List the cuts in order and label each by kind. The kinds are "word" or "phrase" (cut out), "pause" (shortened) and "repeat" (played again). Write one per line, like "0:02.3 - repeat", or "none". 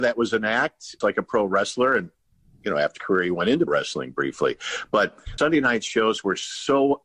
0:01.0 - word
0:03.0 - word
0:03.7 - word
0:05.4 - word